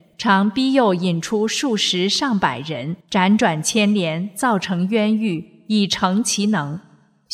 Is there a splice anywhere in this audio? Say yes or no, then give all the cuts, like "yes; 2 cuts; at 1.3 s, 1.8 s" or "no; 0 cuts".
yes; 1 cut; at 3.0 s